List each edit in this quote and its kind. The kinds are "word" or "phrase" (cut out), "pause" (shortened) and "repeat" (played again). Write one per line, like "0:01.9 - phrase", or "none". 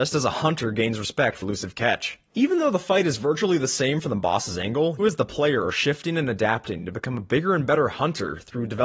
0:01.4 - word
0:05.0 - word